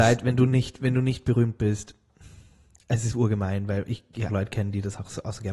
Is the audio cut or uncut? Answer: cut